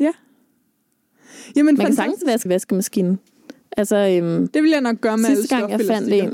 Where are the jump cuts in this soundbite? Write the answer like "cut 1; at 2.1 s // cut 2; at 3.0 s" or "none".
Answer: cut 1; at 2.5 s